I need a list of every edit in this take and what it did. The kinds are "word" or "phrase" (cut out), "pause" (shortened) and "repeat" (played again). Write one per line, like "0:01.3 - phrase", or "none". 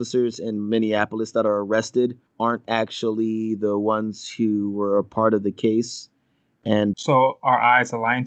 0:02.3 - pause
0:06.9 - word